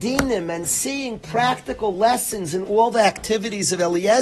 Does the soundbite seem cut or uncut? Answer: uncut